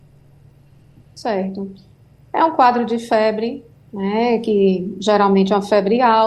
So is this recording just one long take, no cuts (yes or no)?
yes